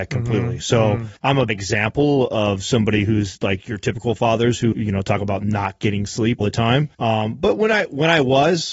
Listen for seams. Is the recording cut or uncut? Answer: cut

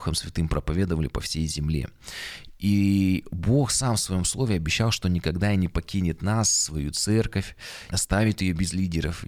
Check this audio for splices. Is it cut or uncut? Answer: cut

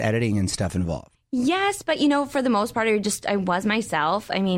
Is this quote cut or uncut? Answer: uncut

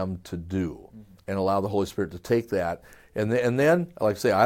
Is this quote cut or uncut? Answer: uncut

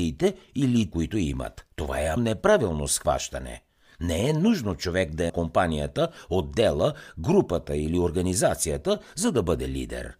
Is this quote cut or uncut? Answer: cut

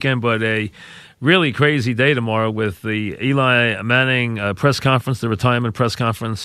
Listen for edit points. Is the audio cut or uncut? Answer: uncut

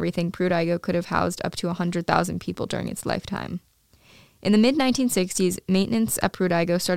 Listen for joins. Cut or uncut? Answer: uncut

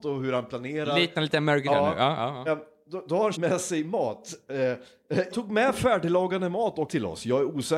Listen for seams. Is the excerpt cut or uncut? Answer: cut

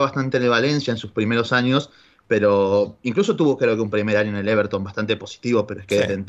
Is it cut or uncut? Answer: uncut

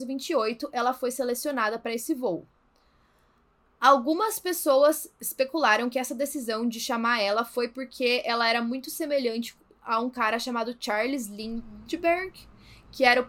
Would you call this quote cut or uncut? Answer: uncut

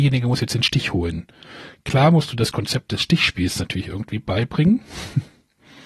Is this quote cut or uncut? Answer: uncut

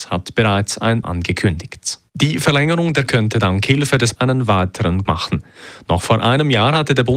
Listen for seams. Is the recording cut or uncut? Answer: cut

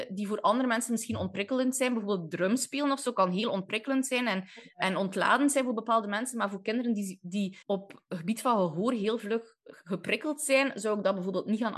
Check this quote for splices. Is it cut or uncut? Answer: cut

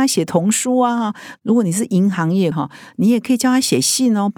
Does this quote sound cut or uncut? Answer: cut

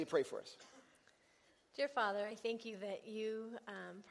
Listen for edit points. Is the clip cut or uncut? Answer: uncut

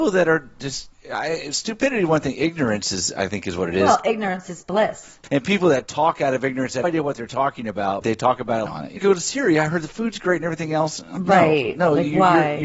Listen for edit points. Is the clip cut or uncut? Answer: cut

